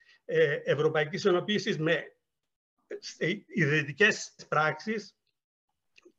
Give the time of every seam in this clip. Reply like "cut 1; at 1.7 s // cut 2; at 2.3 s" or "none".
cut 1; at 4.4 s